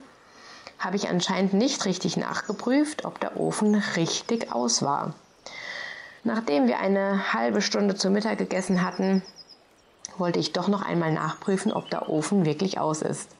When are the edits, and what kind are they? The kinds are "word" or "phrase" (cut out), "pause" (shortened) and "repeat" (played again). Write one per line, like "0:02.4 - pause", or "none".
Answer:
0:06.2 - pause